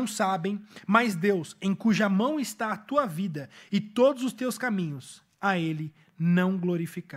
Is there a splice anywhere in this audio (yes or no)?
no